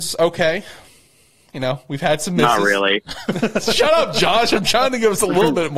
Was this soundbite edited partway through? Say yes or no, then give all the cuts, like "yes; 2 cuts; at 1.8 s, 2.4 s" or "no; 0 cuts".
no; 0 cuts